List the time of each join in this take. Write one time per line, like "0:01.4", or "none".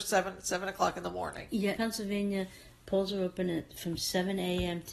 0:01.8